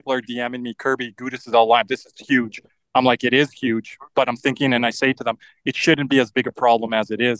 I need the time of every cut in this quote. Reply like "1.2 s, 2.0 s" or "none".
none